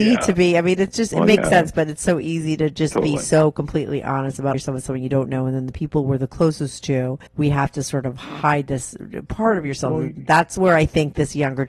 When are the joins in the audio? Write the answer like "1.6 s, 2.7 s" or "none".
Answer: 4.5 s, 7.3 s